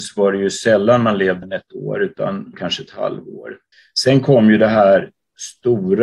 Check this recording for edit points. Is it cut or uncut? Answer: cut